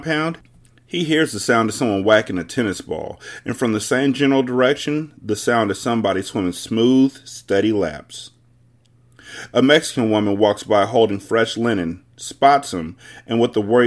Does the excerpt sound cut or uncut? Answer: uncut